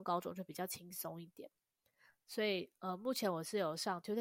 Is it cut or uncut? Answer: uncut